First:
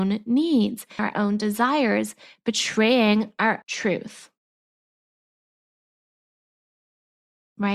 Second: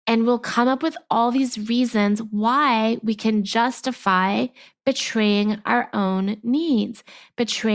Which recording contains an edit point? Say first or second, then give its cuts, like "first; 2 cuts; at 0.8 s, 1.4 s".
first; 2 cuts; at 1.0 s, 3.6 s